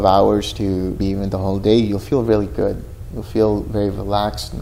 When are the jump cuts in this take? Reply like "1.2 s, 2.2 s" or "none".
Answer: 1.0 s